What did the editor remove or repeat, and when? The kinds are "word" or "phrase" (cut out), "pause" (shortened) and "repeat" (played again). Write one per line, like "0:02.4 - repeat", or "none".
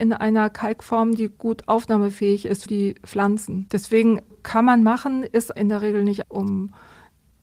0:02.7 - word
0:04.3 - word
0:05.6 - word
0:06.2 - word